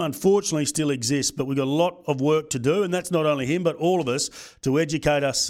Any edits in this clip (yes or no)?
no